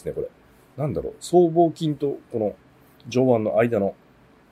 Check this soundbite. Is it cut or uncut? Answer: uncut